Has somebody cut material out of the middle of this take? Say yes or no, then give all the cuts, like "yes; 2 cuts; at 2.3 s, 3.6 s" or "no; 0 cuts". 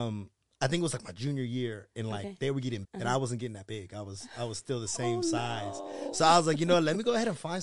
yes; 1 cut; at 2.8 s